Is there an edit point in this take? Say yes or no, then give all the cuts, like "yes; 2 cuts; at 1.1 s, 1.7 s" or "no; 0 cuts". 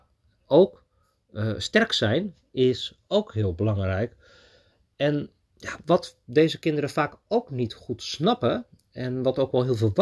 no; 0 cuts